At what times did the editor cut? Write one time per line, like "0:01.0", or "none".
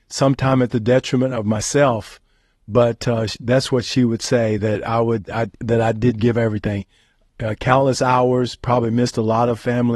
none